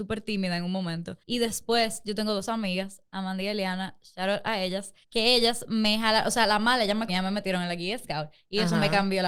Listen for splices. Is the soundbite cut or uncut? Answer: cut